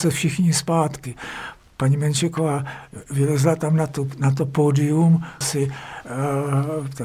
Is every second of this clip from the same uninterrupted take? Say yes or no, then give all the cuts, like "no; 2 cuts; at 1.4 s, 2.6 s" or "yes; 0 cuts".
no; 1 cut; at 5.4 s